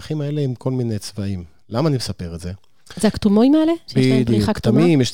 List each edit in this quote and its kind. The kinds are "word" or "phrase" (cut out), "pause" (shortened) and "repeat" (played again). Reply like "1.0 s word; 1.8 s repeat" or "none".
none